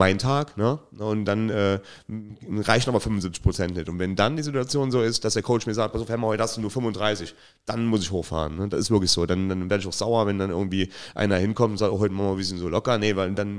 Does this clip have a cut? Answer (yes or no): no